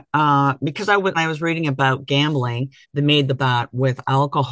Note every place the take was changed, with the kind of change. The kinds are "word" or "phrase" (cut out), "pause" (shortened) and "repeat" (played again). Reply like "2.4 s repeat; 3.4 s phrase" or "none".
1.1 s word; 2.8 s pause; 3.4 s word